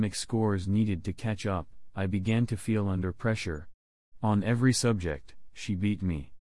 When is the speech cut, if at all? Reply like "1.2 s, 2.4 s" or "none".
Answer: none